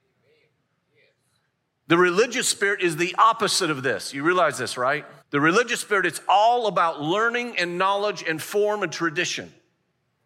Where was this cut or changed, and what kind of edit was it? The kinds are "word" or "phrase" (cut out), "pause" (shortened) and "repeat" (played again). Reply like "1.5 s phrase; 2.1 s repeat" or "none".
5.2 s pause